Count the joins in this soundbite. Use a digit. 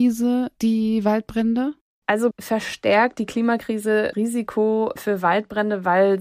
3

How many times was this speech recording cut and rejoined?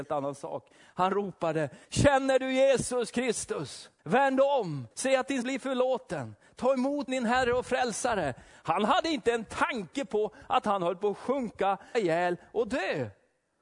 6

